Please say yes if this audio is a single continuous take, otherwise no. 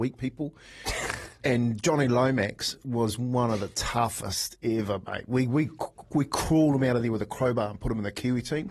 no